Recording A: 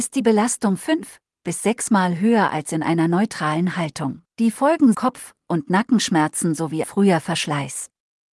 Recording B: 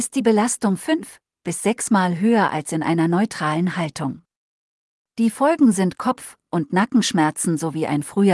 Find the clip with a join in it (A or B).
A